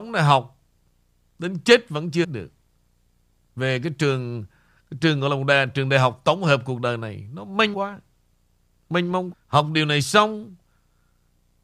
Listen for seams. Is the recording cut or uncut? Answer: cut